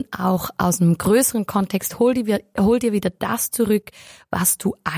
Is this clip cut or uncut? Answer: uncut